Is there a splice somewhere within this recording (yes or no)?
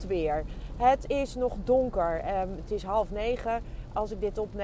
no